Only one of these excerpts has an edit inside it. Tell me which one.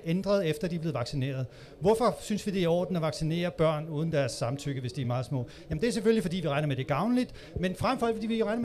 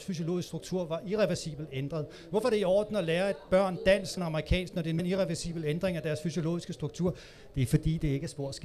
second; 2 cuts; at 4.2 s, 5.0 s

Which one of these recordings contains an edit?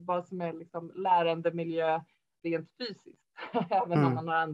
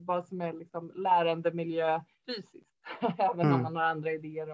second; 1 cut; at 2.2 s

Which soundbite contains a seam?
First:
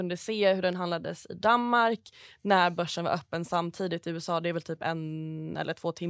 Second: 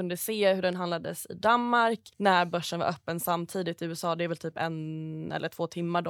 second; 1 cut; at 2.1 s

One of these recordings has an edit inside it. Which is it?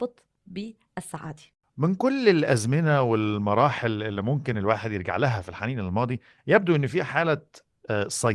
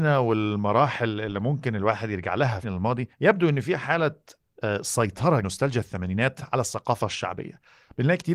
second; 3 cuts; at 2.6 s, 3.1 s, 5.4 s

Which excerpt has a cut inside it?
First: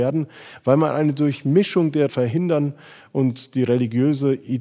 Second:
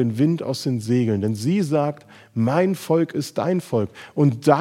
first; 1 cut; at 2.1 s

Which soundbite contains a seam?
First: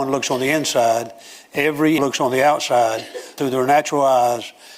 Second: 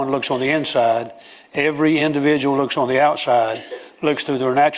first; 2 cuts; at 2.0 s, 3.4 s

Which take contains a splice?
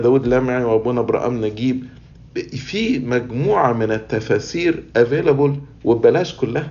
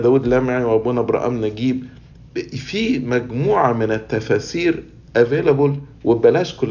first; 1 cut; at 4.9 s

